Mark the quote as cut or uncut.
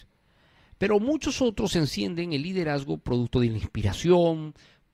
uncut